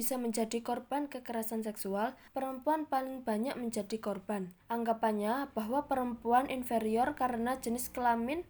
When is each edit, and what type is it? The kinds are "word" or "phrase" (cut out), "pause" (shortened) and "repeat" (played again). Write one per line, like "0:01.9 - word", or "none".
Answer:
0:02.3 - pause
0:04.6 - pause

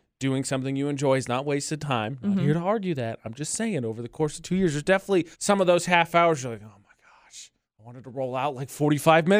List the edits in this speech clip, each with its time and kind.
0:05.3 - pause
0:07.6 - pause

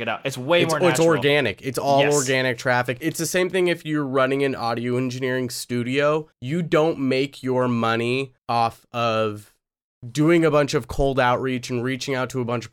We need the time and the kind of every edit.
0:06.3 - pause
0:08.4 - pause

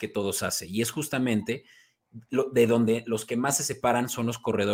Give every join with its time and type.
none

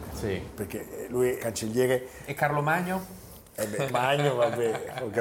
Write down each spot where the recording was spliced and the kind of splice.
0:01.4 - word
0:03.5 - pause
0:03.9 - word

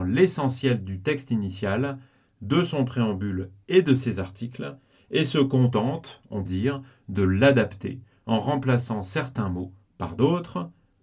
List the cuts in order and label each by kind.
0:06.5 - word

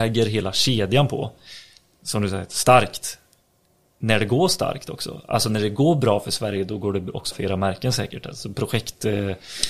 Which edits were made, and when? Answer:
0:07.3 - word

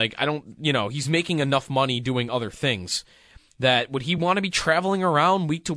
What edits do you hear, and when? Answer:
none

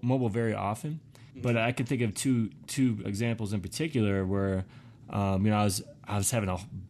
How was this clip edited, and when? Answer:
0:01.3 - pause
0:03.0 - word

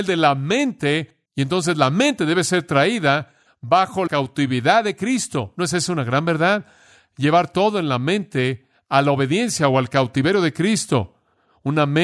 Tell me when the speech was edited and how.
0:01.3 - pause
0:04.1 - word

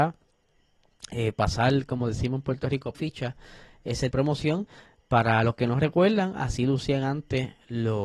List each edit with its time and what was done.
0:02.9 - phrase
0:04.1 - phrase

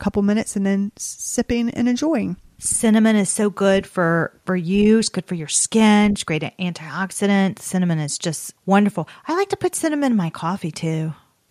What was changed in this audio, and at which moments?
0:08.6 - pause

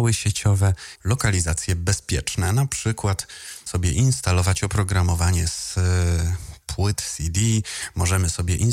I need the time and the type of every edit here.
0:01.0 - word
0:03.7 - word

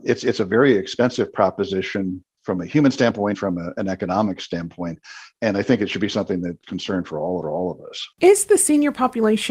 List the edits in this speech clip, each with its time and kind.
0:03.3 - word
0:06.6 - word
0:07.4 - repeat
0:08.1 - pause

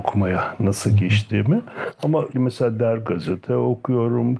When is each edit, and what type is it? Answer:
0:02.3 - word
0:03.1 - word

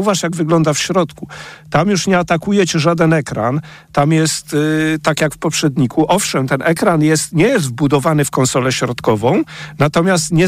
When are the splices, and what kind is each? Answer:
none

